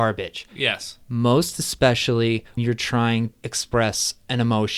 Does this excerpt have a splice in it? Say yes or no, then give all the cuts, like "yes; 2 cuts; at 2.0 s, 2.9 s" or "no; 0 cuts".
yes; 3 cuts; at 1.0 s, 2.6 s, 3.3 s